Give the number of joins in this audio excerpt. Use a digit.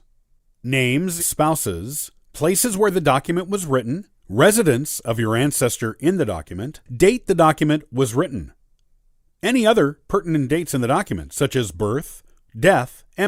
4